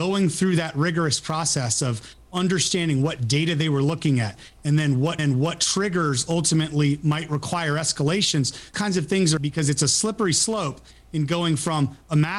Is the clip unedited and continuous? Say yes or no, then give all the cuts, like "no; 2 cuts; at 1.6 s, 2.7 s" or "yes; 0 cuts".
no; 3 cuts; at 5.2 s, 8.7 s, 9.4 s